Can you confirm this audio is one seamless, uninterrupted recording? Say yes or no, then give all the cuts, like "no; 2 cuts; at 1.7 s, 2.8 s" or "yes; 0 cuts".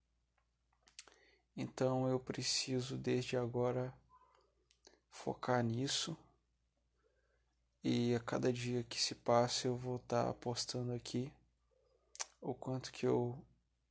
yes; 0 cuts